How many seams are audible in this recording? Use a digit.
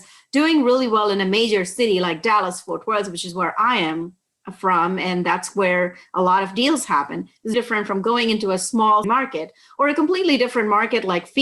2